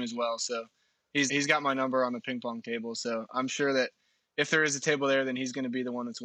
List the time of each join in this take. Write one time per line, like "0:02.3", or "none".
0:01.3